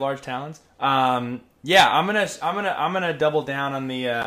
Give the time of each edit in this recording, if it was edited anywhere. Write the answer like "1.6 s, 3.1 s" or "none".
none

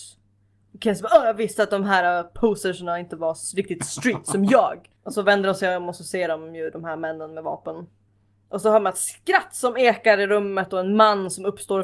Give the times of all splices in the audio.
5.0 s, 8.1 s

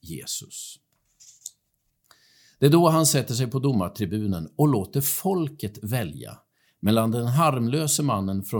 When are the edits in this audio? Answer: none

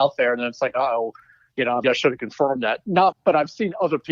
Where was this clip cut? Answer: 1.8 s, 3.1 s

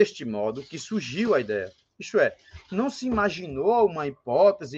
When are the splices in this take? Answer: none

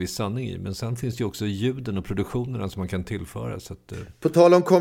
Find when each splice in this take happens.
none

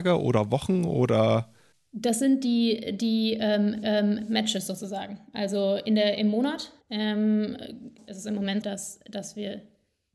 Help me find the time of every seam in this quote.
3.8 s, 6.8 s, 8.6 s

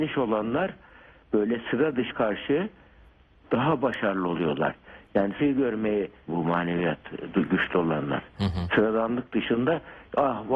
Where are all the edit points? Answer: 2.1 s, 5.4 s, 6.3 s

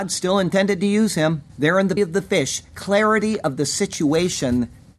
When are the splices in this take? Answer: 1.5 s, 2.0 s

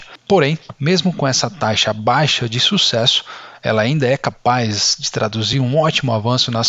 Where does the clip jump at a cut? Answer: none

